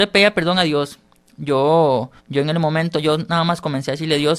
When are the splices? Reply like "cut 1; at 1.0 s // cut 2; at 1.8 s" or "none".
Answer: cut 1; at 2.2 s

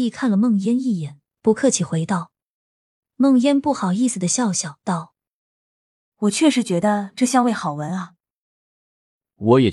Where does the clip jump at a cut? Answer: cut 1; at 6.1 s

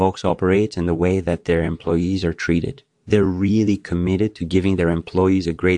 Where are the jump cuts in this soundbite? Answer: none

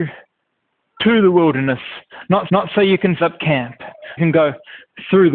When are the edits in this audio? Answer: cut 1; at 2.5 s // cut 2; at 3.2 s // cut 3; at 4.2 s

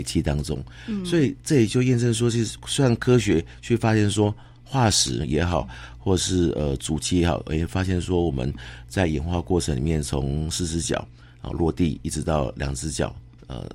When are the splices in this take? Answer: none

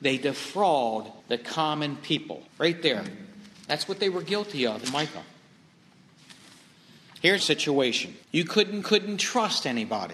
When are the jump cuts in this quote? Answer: cut 1; at 1.2 s // cut 2; at 2.5 s // cut 3; at 4.8 s // cut 4; at 7.4 s // cut 5; at 8.2 s // cut 6; at 8.8 s

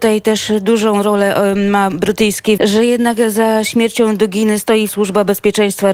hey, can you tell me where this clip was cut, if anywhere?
cut 1; at 2.6 s // cut 2; at 4.9 s

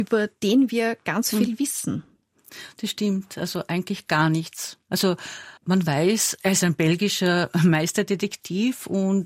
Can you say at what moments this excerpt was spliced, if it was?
cut 1; at 5.6 s

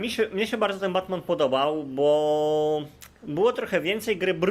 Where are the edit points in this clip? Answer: none

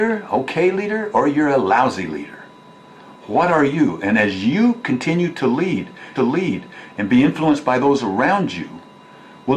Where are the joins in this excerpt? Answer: cut 1; at 6.2 s

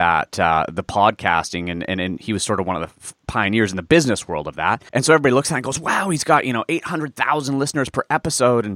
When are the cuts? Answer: cut 1; at 4.9 s

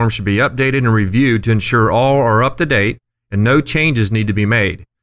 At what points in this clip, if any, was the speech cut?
none

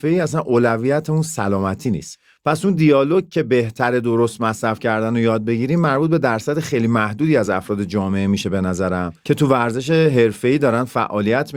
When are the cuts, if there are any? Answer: none

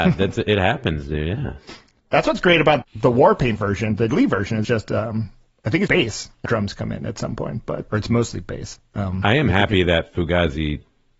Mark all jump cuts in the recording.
cut 1; at 2.8 s // cut 2; at 4.1 s // cut 3; at 4.6 s // cut 4; at 5.9 s // cut 5; at 6.5 s // cut 6; at 7.9 s

